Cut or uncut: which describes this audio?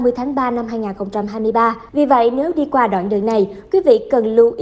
cut